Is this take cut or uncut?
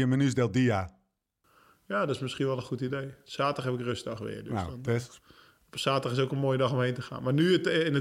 uncut